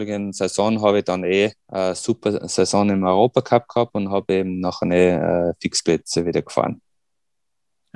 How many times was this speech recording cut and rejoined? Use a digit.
1